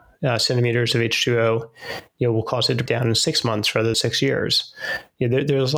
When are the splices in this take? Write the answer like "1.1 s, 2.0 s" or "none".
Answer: 2.9 s, 3.9 s